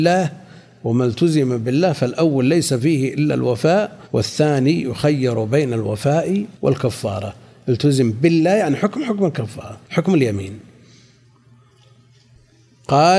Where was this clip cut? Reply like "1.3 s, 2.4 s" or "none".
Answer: 4.0 s, 6.5 s, 9.8 s